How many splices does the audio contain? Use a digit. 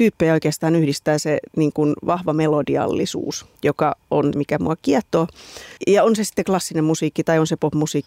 3